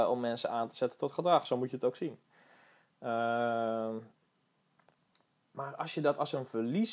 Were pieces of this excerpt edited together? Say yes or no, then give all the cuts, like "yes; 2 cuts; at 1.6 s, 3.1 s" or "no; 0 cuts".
no; 0 cuts